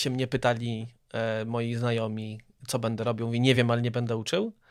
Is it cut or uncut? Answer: uncut